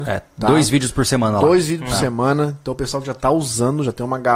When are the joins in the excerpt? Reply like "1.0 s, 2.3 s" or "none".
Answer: none